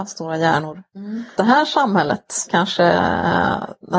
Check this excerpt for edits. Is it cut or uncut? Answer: cut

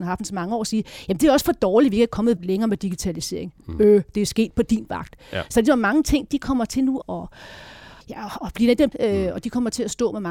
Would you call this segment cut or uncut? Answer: cut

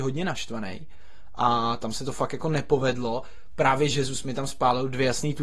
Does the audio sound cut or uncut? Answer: uncut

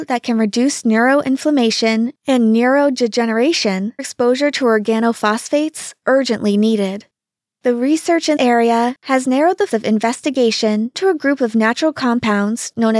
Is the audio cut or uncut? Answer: cut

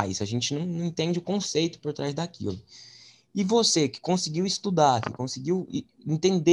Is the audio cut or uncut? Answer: uncut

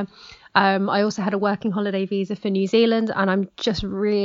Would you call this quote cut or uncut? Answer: uncut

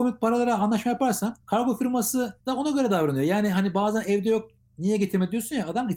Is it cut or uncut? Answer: uncut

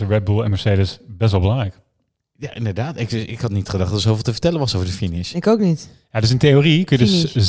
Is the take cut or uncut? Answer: uncut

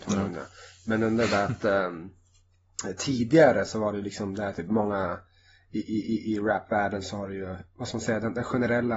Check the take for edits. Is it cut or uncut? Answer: uncut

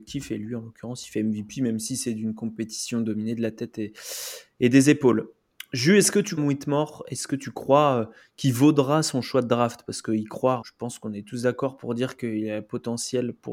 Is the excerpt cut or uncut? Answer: cut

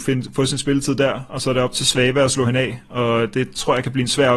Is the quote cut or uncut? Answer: uncut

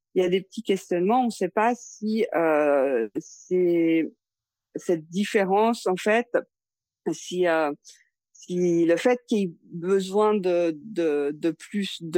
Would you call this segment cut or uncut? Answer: uncut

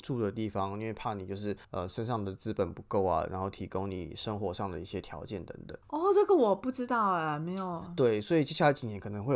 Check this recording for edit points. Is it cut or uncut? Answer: cut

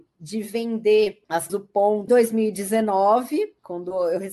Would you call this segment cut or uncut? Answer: cut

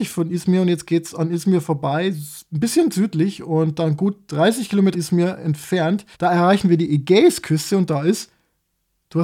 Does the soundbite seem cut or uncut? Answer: cut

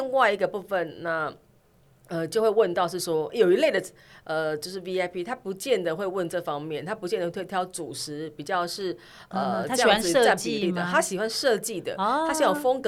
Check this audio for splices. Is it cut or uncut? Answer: uncut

